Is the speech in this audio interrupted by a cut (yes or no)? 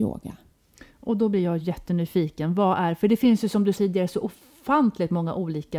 yes